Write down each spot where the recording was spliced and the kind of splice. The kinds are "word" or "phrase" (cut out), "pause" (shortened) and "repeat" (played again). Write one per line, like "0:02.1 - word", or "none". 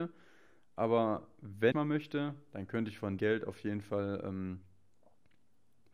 0:01.7 - word
0:03.2 - word